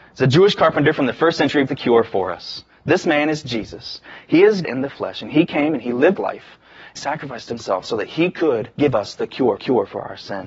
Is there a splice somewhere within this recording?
yes; 6 cuts; at 1.7 s, 4.6 s, 6.2 s, 7.0 s, 8.7 s, 9.6 s

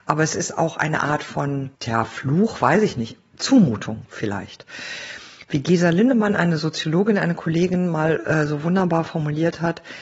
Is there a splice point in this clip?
yes; 1 cut; at 1.7 s

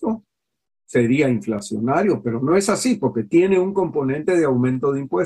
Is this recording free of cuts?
yes; 0 cuts

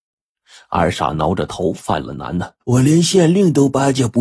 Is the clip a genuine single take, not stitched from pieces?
no; 1 cut; at 2.6 s

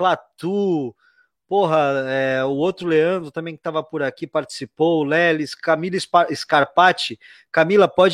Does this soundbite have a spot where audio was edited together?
no; 0 cuts

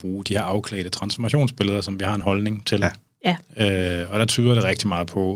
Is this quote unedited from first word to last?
yes; 0 cuts

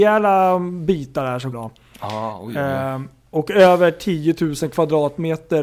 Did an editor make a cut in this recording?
yes; 1 cut; at 1.5 s

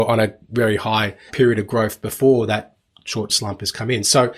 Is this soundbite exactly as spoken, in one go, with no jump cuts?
no; 2 cuts; at 1.3 s, 3.3 s

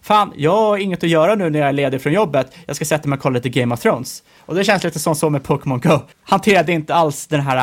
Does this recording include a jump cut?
yes; 1 cut; at 6.1 s

